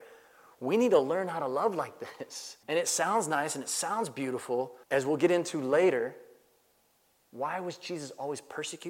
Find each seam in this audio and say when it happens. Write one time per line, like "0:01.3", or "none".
0:02.6
0:04.8